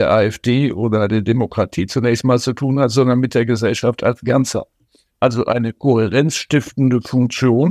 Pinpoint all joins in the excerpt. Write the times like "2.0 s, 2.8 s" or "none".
none

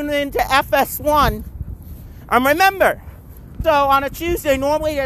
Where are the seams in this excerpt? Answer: 3.6 s

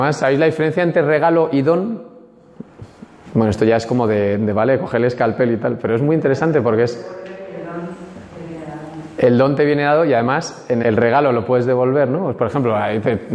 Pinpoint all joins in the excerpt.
10.8 s

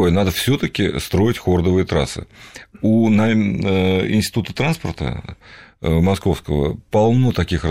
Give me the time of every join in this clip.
none

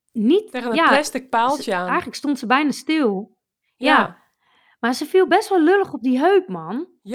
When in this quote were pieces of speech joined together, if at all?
none

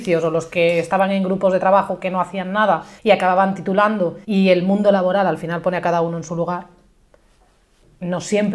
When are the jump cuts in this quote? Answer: 3.0 s, 4.2 s

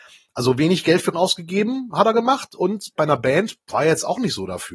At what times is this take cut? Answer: 1.1 s, 3.0 s

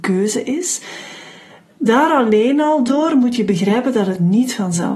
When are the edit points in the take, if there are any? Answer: none

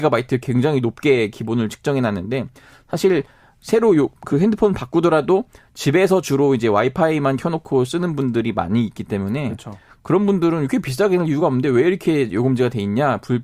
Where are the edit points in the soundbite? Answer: none

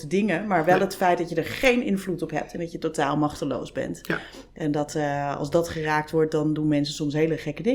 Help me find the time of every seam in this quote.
none

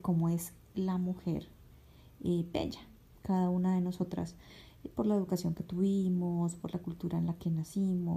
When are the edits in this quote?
none

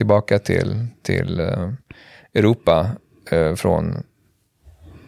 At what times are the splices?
none

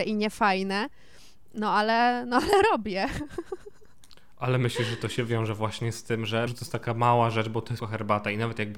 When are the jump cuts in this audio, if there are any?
6.5 s, 7.8 s

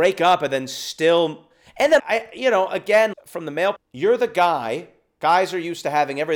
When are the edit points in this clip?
2.0 s, 3.1 s, 3.8 s

